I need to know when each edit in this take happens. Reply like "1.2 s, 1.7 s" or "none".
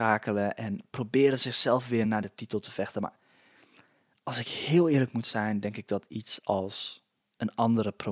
none